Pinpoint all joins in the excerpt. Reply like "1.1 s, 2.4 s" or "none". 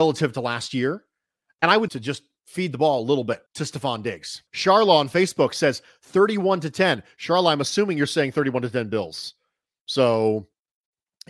1.9 s, 3.5 s, 4.5 s